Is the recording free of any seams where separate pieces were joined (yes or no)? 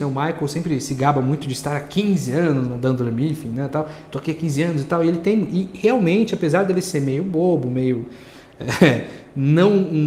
yes